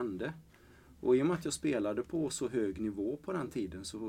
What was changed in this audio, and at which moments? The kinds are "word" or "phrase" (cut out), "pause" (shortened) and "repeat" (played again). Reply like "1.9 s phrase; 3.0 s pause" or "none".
none